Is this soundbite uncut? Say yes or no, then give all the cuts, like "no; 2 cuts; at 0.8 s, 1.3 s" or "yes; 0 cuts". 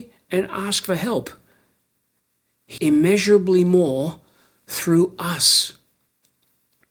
no; 1 cut; at 2.8 s